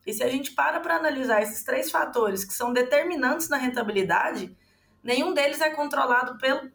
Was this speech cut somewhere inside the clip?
no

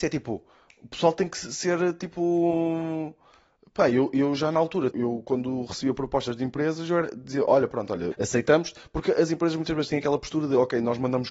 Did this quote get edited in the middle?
yes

